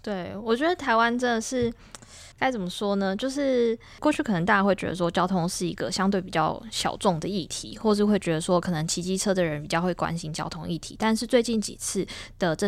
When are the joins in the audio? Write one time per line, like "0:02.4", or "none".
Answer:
0:02.3